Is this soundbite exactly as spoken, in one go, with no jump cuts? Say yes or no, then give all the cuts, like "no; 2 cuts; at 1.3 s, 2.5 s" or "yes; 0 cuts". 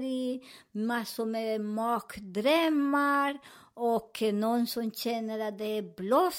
yes; 0 cuts